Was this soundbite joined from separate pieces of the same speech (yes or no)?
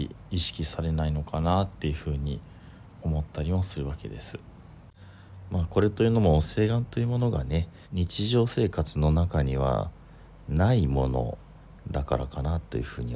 yes